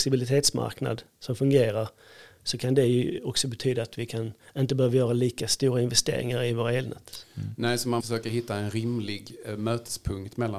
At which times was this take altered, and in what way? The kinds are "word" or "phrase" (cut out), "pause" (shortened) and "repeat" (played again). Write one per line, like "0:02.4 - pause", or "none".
0:08.0 - word